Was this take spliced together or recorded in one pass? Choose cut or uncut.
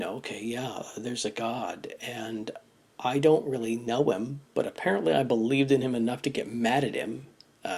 uncut